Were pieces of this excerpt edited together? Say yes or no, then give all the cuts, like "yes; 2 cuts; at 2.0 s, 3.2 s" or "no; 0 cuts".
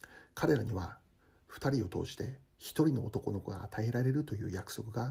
no; 0 cuts